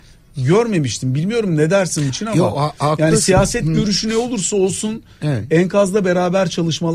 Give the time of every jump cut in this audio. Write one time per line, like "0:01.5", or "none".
0:02.1